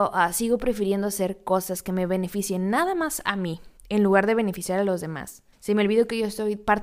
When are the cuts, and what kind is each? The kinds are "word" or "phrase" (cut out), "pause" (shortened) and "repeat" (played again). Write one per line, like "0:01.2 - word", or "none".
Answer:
0:03.8 - pause
0:05.5 - pause